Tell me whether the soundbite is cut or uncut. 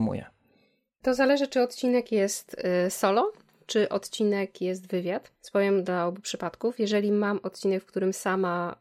cut